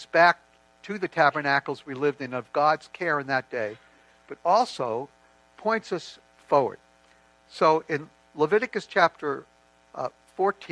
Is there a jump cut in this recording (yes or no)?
no